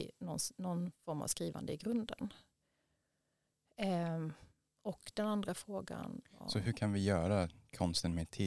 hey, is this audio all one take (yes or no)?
yes